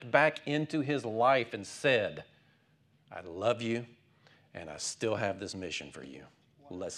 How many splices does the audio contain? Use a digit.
0